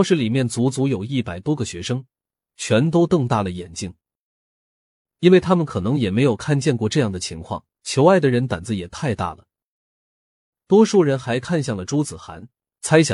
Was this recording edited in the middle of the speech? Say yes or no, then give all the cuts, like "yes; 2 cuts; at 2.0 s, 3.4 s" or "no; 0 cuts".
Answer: yes; 1 cut; at 7.7 s